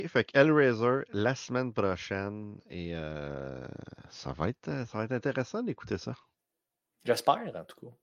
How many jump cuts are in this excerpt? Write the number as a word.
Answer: zero